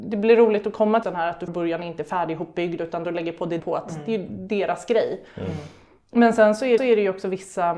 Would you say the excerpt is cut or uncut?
cut